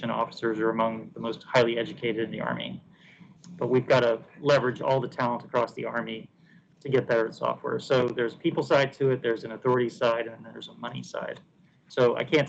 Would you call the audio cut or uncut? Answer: uncut